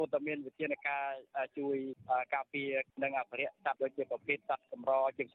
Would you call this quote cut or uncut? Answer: uncut